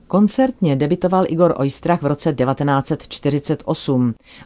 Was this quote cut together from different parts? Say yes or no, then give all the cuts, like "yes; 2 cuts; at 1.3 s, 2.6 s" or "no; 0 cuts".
no; 0 cuts